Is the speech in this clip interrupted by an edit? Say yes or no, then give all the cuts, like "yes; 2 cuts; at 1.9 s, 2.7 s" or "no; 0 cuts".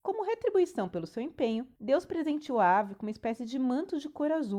no; 0 cuts